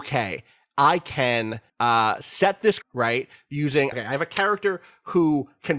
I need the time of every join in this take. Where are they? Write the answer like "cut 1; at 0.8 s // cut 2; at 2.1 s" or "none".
cut 1; at 1.7 s // cut 2; at 2.8 s // cut 3; at 3.9 s